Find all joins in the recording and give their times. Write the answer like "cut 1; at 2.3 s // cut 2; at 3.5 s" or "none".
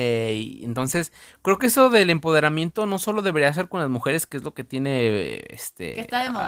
none